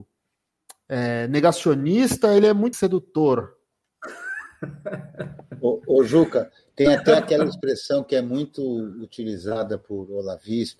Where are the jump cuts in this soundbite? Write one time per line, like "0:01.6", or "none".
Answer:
0:02.7